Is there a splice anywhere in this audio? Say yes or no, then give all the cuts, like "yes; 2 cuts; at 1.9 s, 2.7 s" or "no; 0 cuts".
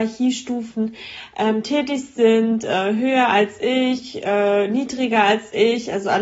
no; 0 cuts